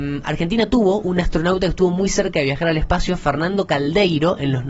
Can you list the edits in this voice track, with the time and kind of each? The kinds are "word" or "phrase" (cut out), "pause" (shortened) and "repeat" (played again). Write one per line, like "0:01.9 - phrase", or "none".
none